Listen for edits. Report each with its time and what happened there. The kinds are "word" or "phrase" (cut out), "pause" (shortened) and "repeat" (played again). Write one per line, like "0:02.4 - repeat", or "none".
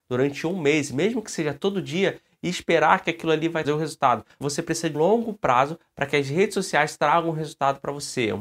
0:03.6 - word
0:04.4 - word
0:04.9 - word